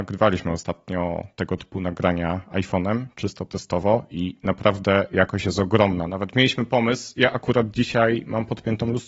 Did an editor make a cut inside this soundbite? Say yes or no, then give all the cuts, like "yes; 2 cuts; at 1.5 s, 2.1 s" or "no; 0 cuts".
no; 0 cuts